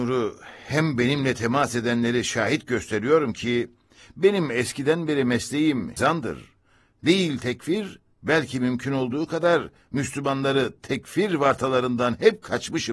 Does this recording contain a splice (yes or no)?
yes